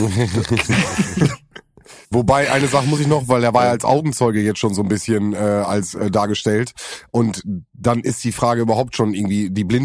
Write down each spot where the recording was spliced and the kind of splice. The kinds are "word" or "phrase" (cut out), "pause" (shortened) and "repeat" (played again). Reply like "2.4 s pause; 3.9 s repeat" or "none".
2.0 s pause